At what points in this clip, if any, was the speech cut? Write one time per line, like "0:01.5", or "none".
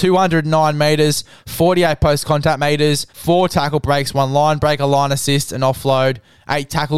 0:03.1